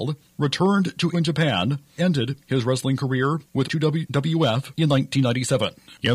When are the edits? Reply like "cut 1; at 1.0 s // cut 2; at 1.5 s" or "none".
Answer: cut 1; at 1.1 s // cut 2; at 2.0 s // cut 3; at 3.6 s